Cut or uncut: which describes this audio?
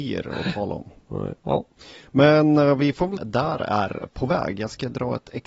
cut